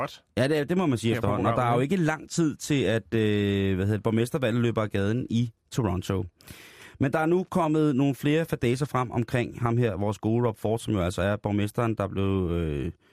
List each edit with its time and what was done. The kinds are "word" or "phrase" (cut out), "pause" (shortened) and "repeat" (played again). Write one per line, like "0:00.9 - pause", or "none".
none